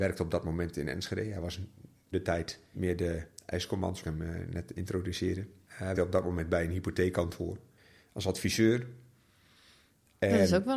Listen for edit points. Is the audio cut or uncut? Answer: cut